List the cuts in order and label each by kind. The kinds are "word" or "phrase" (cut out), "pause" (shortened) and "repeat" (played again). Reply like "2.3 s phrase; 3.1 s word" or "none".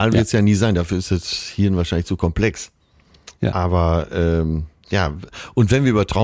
3.4 s pause